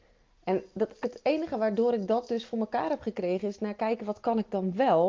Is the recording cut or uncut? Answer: cut